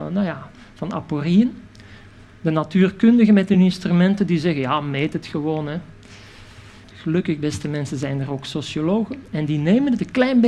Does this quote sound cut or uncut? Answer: uncut